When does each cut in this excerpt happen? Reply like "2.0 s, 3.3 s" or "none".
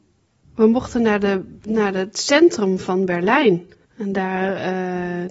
3.8 s